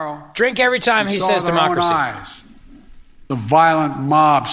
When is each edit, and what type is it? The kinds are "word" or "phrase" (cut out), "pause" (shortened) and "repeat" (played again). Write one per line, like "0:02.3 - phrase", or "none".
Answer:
none